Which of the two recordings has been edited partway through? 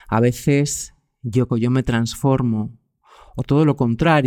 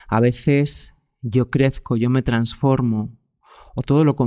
first; 1 cut; at 1.5 s

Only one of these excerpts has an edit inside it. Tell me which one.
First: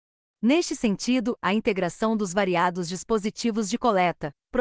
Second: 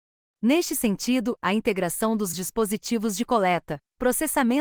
second; 1 cut; at 2.3 s

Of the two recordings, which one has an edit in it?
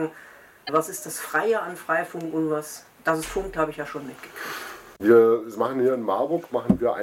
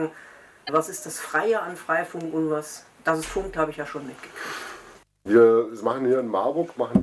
first; 1 cut; at 5.0 s

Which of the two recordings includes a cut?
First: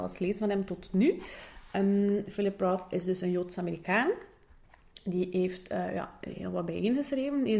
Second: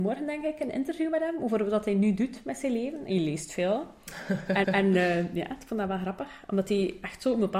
second; 1 cut; at 4.6 s

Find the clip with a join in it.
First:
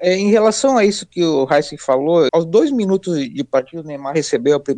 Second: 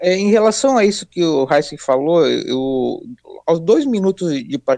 first; 1 cut; at 2.3 s

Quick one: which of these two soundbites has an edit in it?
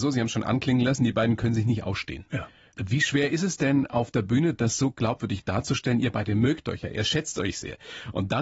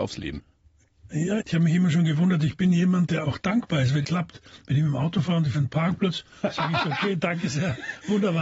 second; 3 cuts; at 1.4 s, 4.0 s, 5.5 s

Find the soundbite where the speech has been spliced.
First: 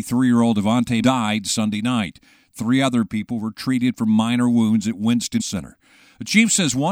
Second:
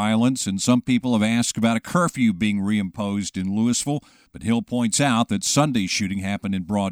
first; 2 cuts; at 1.0 s, 5.4 s

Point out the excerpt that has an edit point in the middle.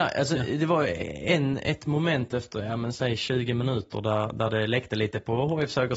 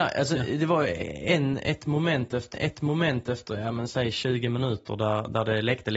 second; 1 cut; at 2.5 s

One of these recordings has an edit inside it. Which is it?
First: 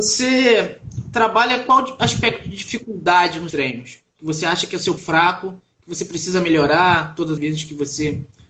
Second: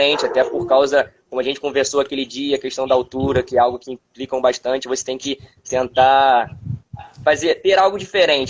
first; 3 cuts; at 3.5 s, 5.0 s, 7.4 s

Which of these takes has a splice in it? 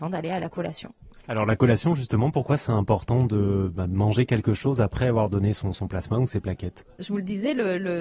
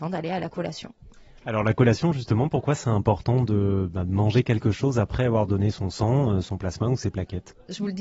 first; 2 cuts; at 1.2 s, 5.7 s

